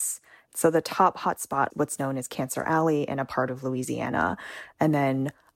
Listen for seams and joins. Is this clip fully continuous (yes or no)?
no